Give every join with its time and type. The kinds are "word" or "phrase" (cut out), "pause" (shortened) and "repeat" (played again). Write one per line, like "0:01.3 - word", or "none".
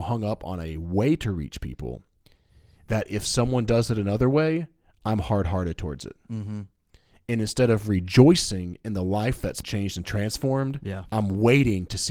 0:09.6 - word